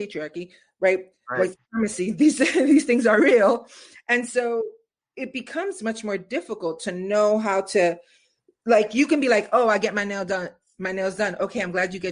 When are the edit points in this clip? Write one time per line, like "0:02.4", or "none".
none